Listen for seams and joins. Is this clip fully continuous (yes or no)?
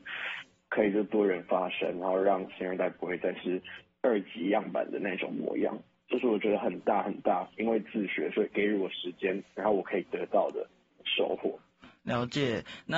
yes